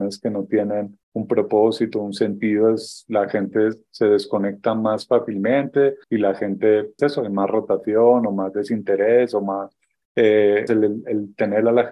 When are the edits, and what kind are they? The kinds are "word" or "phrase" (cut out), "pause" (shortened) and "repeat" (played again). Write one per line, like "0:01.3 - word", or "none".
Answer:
0:01.0 - pause
0:06.0 - pause
0:07.0 - word
0:10.7 - word